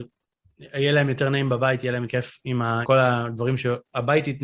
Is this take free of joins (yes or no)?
no